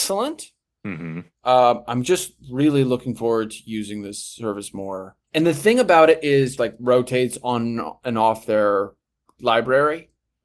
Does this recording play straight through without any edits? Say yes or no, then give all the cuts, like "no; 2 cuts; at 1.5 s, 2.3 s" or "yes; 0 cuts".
no; 2 cuts; at 5.2 s, 6.6 s